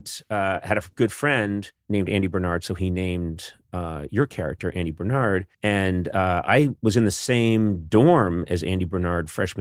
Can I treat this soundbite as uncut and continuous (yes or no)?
no